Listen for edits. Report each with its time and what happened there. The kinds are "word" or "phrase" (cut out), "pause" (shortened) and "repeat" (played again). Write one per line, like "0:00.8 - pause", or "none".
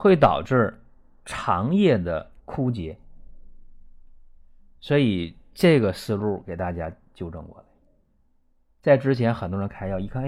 0:02.4 - pause